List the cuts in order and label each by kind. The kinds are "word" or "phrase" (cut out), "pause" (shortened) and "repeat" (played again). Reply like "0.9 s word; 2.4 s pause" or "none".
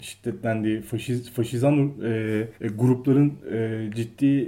2.5 s pause